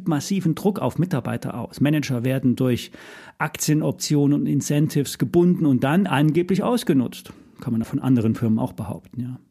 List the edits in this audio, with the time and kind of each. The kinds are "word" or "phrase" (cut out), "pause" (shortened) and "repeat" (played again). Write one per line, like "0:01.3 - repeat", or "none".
0:07.8 - word